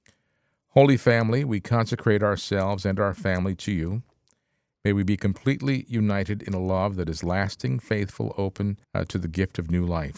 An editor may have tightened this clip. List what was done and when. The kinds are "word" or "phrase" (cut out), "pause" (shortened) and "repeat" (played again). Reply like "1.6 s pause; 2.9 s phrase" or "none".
8.8 s pause